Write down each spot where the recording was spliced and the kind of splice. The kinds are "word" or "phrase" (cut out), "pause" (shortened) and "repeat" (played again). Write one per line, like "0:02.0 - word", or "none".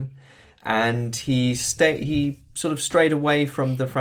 none